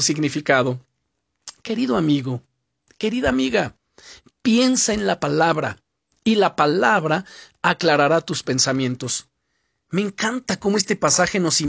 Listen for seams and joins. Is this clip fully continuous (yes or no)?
yes